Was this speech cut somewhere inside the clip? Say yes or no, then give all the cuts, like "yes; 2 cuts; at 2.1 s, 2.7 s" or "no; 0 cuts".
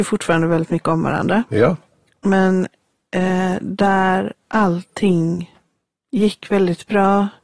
no; 0 cuts